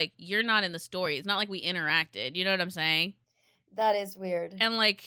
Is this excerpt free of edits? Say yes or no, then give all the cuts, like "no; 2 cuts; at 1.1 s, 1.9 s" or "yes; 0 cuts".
yes; 0 cuts